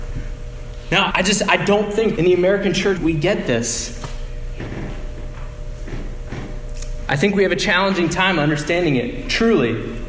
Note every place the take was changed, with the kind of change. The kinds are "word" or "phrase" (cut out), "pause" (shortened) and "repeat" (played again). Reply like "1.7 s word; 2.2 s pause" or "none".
1.1 s word; 2.2 s word; 3.0 s word